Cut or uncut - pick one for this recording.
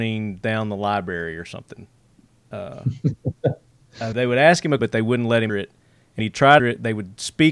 cut